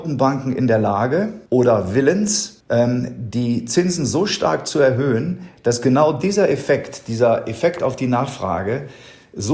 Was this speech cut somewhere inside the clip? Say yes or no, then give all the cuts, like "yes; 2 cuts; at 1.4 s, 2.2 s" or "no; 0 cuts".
yes; 2 cuts; at 1.5 s, 2.6 s